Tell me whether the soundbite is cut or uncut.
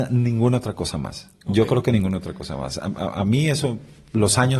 uncut